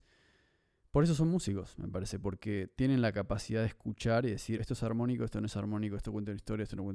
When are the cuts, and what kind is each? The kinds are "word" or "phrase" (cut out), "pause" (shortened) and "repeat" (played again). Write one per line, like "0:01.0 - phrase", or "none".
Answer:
0:04.6 - word